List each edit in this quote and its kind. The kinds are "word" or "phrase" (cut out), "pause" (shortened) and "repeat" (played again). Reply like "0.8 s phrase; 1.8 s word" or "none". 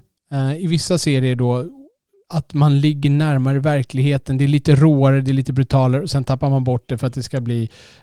none